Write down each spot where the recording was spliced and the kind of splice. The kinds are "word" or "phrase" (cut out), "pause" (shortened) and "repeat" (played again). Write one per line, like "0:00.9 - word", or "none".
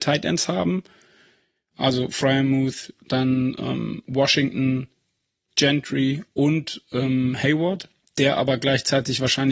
none